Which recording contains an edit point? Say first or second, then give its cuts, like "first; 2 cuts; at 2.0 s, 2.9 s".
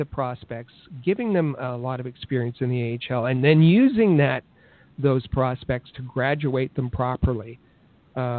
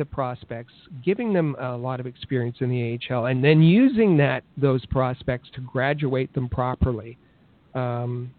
second; 1 cut; at 4.5 s